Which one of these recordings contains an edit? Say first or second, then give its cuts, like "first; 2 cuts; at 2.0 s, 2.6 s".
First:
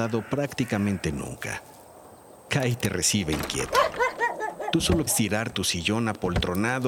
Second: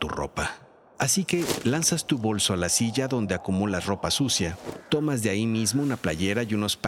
first; 2 cuts; at 5.1 s, 5.5 s